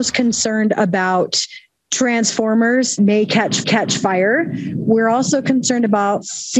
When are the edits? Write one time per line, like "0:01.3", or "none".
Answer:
0:03.0
0:03.6